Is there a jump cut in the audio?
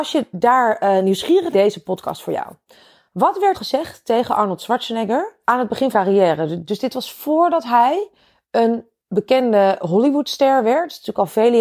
yes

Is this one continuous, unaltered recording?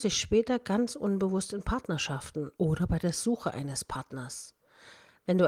no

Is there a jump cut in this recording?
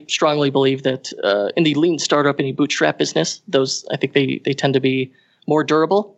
no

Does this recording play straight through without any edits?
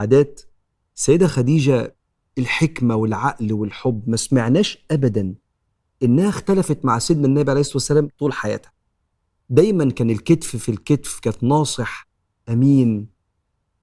yes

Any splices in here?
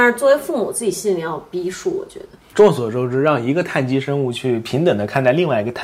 yes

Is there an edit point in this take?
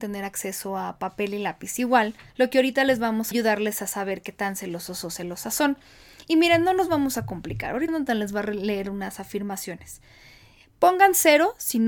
yes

